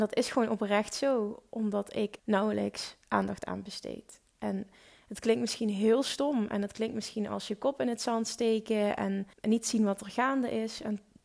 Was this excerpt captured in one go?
no; 2 cuts; at 2.2 s, 9.3 s

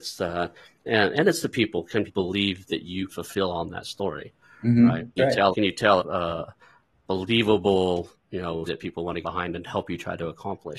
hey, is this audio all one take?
no; 9 cuts; at 1.1 s, 2.1 s, 3.1 s, 5.2 s, 5.5 s, 6.0 s, 6.9 s, 8.7 s, 9.2 s

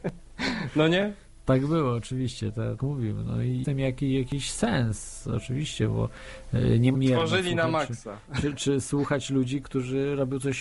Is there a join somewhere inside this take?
yes; 5 cuts; at 2.8 s, 3.6 s, 6.9 s, 8.4 s, 9.6 s

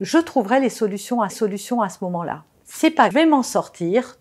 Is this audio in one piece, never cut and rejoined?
no; 3 cuts; at 1.3 s, 2.5 s, 3.1 s

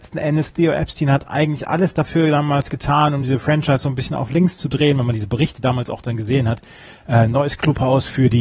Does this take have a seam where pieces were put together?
no; 0 cuts

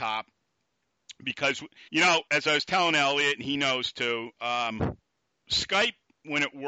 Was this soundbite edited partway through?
yes; 2 cuts; at 1.9 s, 2.3 s

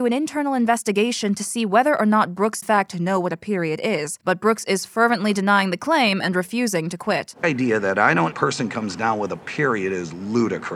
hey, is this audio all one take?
no; 3 cuts; at 2.6 s, 7.4 s, 8.3 s

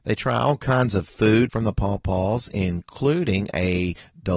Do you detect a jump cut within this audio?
yes; 1 cut; at 1.5 s

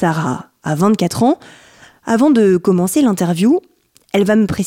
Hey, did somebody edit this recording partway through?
no; 0 cuts

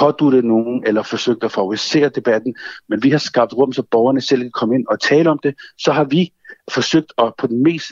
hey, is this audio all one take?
yes; 0 cuts

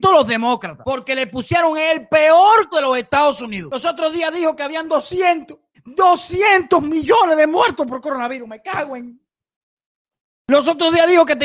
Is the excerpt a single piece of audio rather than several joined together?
no; 2 cuts; at 2.7 s, 5.7 s

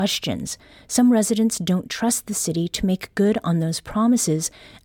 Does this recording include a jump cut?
no; 0 cuts

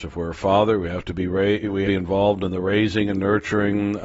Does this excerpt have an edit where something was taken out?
yes; 1 cut; at 1.9 s

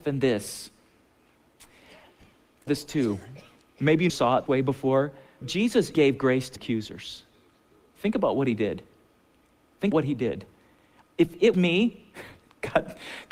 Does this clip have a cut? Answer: yes; 8 cuts; at 2.7 s, 4.1 s, 4.5 s, 5.4 s, 5.9 s, 6.6 s, 9.9 s, 11.5 s

